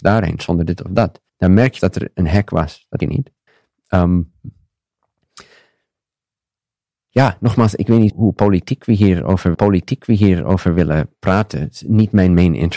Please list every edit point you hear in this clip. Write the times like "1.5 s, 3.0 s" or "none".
1.3 s, 1.8 s, 3.0 s, 3.5 s, 8.1 s, 9.5 s